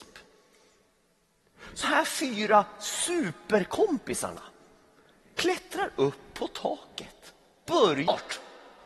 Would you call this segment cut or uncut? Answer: cut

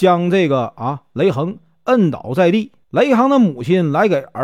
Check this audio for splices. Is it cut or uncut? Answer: cut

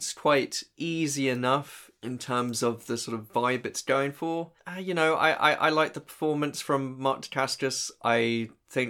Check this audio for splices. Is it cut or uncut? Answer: cut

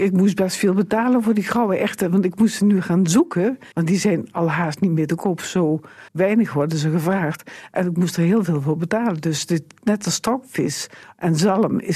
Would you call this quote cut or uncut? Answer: cut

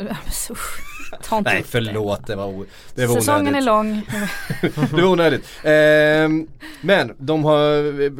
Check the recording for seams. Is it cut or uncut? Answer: uncut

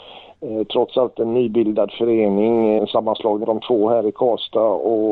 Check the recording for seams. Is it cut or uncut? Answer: cut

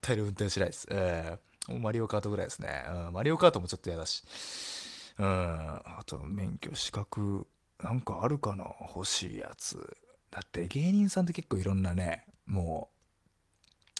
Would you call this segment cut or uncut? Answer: uncut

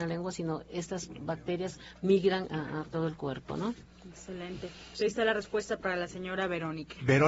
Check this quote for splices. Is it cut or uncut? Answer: uncut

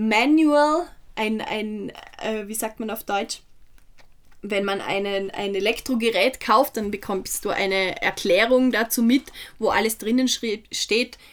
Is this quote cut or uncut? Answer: uncut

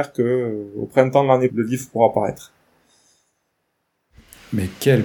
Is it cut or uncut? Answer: cut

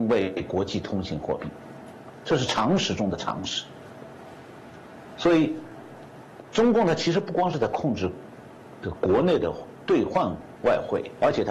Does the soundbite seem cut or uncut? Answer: uncut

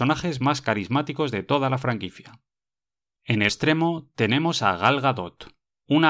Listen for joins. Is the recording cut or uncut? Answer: cut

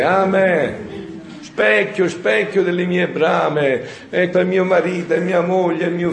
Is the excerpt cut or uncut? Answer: cut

